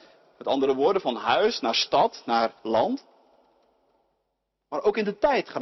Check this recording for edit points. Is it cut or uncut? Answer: cut